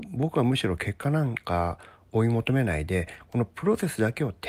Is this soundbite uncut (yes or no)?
yes